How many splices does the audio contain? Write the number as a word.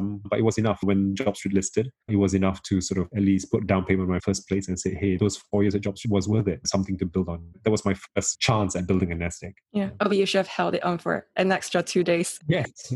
three